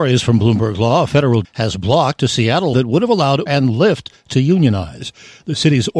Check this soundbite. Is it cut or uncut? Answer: cut